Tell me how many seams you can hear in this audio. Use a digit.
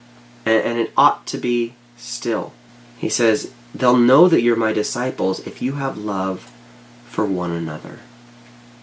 1